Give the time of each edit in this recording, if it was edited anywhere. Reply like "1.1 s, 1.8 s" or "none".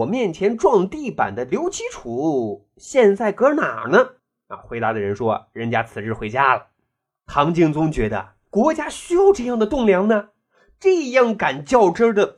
4.2 s